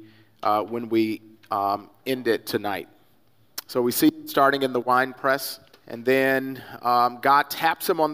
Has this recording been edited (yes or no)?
yes